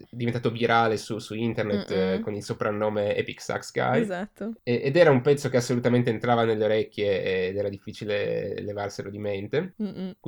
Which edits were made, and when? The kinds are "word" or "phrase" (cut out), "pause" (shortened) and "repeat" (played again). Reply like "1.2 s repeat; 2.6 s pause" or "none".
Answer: none